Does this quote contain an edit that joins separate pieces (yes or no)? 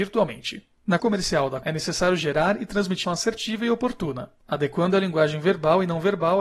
yes